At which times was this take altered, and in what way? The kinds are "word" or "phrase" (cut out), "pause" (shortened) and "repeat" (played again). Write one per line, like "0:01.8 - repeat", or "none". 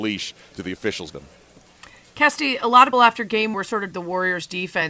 0:01.1 - word
0:02.9 - word
0:03.5 - word
0:03.9 - word